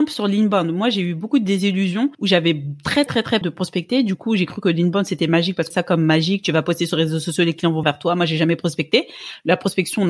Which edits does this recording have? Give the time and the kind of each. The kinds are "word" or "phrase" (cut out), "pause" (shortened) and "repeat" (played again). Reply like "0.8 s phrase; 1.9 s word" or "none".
2.1 s pause; 3.1 s word; 3.4 s word; 5.7 s phrase; 7.8 s word